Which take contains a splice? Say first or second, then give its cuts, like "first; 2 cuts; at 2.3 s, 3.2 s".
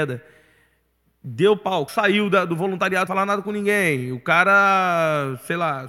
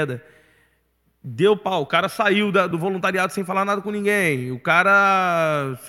first; 2 cuts; at 1.9 s, 3.1 s